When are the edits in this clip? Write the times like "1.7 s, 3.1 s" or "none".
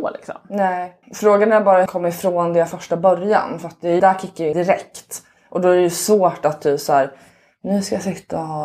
1.0 s, 1.9 s, 2.7 s, 4.0 s, 4.5 s